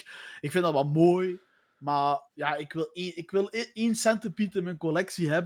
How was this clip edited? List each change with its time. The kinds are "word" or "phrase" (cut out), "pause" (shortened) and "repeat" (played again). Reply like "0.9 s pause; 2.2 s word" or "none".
2.3 s pause

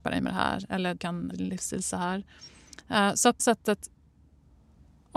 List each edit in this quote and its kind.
1.0 s word; 1.3 s word; 3.4 s word

